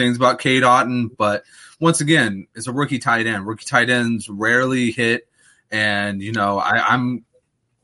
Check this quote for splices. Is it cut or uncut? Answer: uncut